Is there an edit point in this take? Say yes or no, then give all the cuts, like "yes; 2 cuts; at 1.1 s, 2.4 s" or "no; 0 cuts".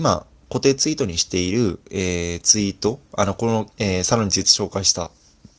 yes; 1 cut; at 3.7 s